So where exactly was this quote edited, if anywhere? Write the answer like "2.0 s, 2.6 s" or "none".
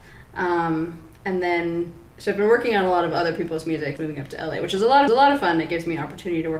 2.1 s, 4.0 s, 5.1 s